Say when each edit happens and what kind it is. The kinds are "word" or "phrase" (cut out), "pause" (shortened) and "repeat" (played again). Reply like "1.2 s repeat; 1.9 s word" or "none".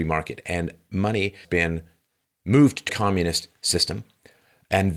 1.4 s word; 2.2 s word; 2.9 s word